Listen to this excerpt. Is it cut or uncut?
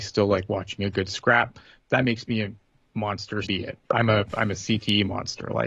cut